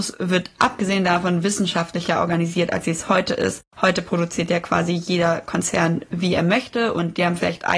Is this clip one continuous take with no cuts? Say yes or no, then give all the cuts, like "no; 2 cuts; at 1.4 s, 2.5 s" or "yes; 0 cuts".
yes; 0 cuts